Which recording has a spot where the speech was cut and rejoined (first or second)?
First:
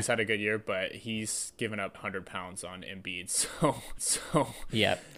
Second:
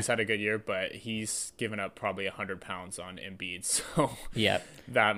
first